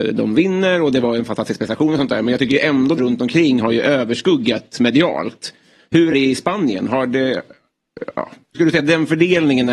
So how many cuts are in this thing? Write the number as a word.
three